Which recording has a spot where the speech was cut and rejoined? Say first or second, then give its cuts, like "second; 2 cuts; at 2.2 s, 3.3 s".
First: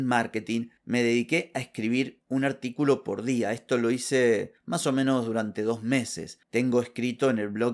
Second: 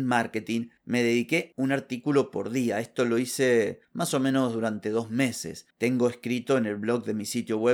second; 1 cut; at 1.5 s